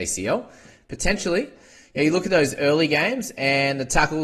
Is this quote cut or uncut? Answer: uncut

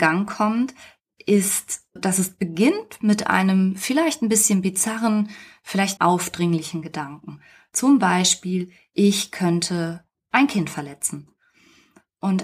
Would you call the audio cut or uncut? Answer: cut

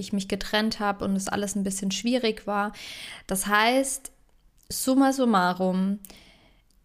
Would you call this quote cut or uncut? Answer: uncut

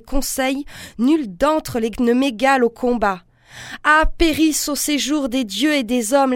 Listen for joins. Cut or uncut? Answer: cut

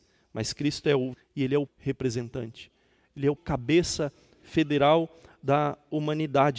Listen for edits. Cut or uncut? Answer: cut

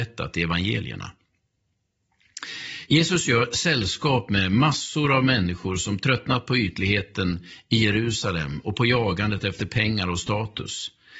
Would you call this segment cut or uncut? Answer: uncut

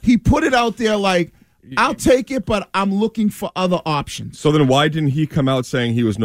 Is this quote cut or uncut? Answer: uncut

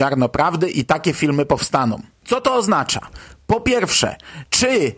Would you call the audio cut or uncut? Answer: uncut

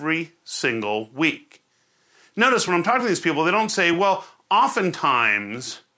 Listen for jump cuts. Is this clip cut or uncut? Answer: uncut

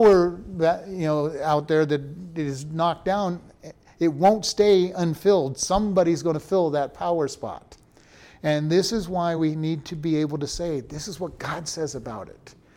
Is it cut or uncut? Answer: uncut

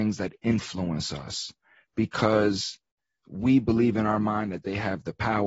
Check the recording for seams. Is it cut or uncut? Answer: uncut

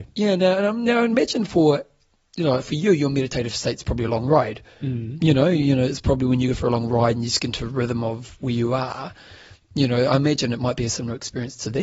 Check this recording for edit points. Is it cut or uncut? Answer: uncut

